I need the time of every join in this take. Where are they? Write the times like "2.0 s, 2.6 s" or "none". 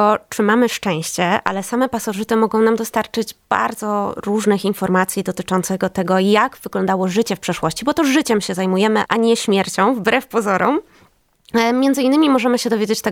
9.1 s